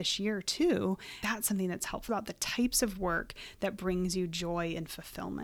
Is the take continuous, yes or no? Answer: no